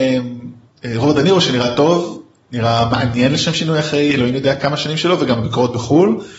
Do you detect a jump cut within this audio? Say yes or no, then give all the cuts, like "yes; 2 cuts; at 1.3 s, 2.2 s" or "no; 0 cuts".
no; 0 cuts